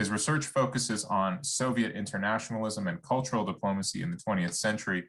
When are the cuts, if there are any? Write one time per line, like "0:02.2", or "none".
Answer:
none